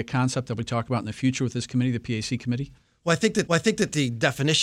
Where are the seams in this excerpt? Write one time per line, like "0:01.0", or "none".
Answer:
0:03.5

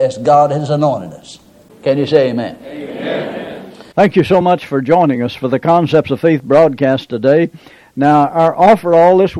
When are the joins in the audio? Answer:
none

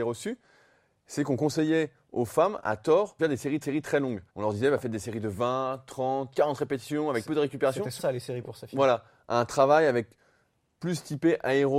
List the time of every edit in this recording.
0:03.2
0:03.6
0:04.3
0:07.2
0:08.0

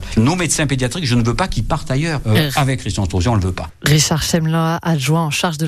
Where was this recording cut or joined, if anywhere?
none

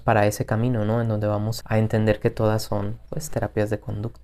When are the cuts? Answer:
0:01.6

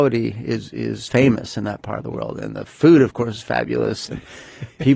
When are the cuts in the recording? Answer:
0:01.1

